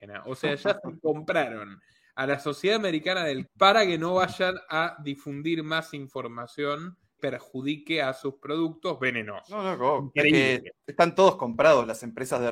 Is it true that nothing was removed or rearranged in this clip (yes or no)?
no